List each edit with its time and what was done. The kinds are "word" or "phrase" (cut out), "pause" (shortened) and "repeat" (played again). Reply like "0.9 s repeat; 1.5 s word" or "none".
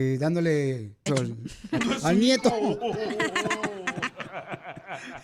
1.1 s word; 1.8 s word